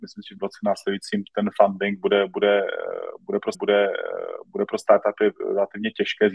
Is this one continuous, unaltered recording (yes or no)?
no